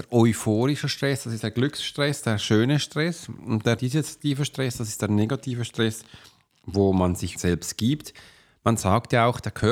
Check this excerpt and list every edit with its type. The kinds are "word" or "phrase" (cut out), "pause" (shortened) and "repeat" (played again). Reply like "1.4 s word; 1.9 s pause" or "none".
1.4 s word; 3.8 s phrase; 7.3 s word